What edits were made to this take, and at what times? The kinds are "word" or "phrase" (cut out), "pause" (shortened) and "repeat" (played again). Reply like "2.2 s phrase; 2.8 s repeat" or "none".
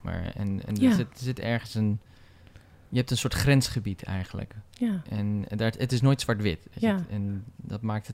none

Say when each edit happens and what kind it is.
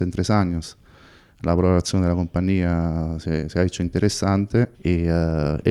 4.7 s pause

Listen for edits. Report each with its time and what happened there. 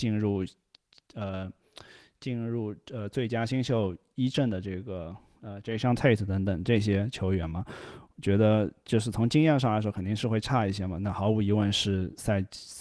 none

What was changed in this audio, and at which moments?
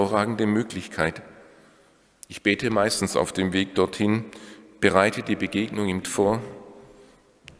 6.0 s word

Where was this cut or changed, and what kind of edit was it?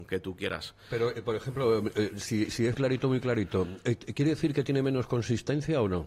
2.7 s word

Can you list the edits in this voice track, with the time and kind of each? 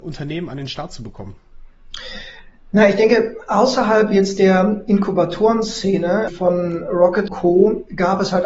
6.3 s word; 7.3 s word

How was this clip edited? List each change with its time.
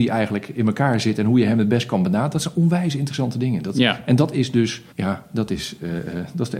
4.9 s pause

